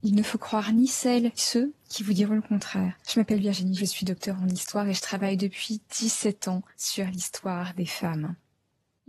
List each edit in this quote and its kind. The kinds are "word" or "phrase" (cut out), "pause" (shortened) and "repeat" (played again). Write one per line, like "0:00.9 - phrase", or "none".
0:01.4 - word
0:03.8 - word